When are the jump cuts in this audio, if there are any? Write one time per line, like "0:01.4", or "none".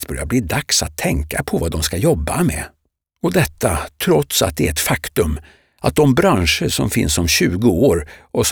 none